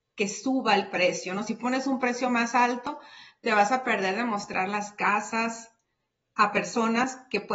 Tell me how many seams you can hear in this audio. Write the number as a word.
zero